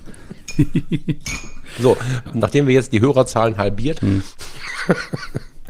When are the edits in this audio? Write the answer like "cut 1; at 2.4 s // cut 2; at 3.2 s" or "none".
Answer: cut 1; at 2.3 s // cut 2; at 4.0 s